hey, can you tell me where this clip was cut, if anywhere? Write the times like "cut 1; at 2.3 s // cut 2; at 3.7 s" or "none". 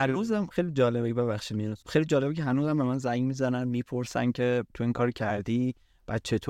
cut 1; at 1.8 s // cut 2; at 4.7 s